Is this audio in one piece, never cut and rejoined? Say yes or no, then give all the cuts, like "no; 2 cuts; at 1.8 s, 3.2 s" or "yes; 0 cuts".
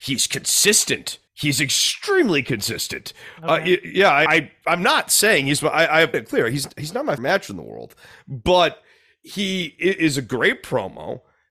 no; 4 cuts; at 1.3 s, 4.3 s, 6.1 s, 7.2 s